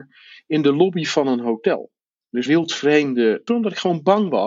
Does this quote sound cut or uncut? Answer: cut